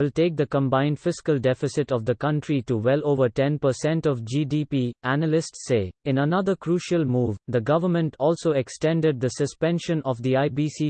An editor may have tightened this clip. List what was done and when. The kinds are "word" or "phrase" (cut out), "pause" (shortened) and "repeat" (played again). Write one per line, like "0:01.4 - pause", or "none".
0:06.0 - pause